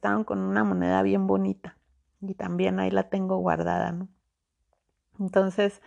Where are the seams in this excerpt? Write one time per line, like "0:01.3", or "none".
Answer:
none